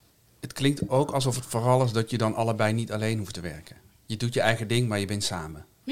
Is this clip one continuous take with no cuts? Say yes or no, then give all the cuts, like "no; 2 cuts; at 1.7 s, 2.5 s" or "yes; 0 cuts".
yes; 0 cuts